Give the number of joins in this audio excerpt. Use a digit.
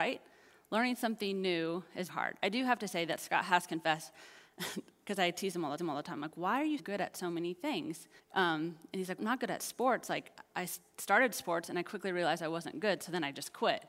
5